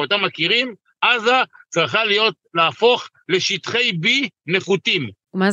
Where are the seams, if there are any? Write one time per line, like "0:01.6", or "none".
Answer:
none